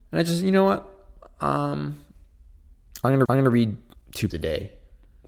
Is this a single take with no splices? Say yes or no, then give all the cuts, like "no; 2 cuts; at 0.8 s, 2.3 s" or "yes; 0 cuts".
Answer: no; 2 cuts; at 3.3 s, 4.3 s